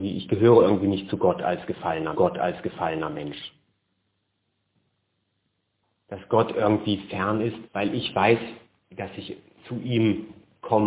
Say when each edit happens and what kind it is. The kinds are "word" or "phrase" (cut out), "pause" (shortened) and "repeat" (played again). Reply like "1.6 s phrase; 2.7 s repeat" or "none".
2.1 s repeat; 7.7 s pause; 8.7 s pause; 9.6 s word